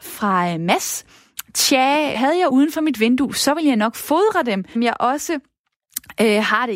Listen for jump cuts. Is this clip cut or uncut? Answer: cut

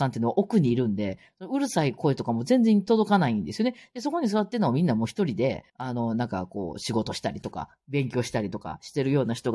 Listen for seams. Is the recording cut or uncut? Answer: cut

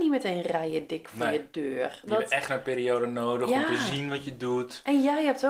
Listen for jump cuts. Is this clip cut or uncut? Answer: cut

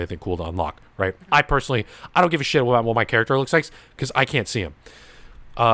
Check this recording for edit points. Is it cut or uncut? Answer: uncut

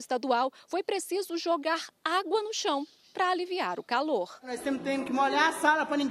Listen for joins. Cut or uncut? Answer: uncut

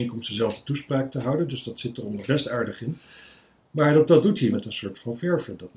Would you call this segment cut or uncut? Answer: cut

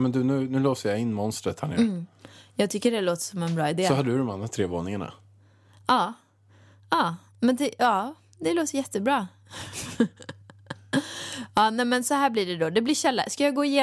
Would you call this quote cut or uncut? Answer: uncut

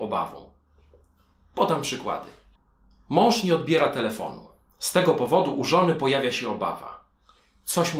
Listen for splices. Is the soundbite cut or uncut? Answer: uncut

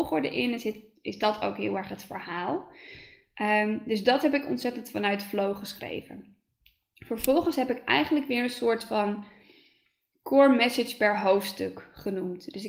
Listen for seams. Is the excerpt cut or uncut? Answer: uncut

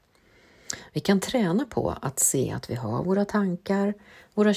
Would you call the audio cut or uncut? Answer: uncut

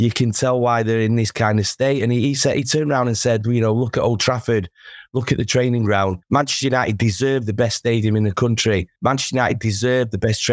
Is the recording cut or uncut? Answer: cut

